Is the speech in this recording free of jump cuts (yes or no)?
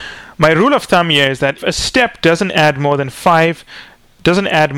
no